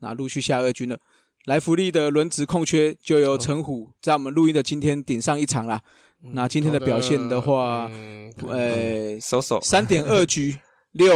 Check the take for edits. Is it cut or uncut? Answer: uncut